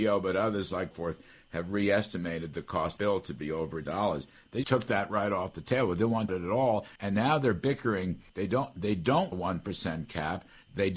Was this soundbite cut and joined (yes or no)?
yes